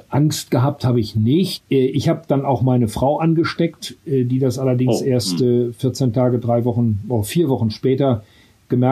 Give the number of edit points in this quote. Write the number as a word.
zero